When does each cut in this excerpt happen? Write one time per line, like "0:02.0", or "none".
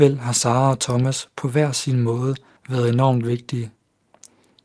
0:02.6